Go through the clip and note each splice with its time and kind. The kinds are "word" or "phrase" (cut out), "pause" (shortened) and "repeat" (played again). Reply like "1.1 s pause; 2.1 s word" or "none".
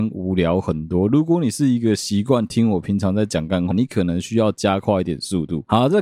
3.7 s word